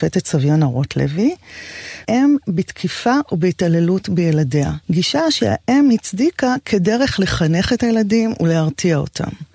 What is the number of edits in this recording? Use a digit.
2